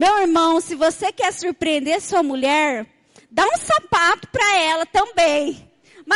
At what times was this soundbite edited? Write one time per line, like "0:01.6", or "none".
none